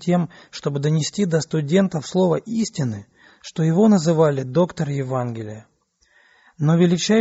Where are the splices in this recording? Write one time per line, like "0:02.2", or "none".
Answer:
none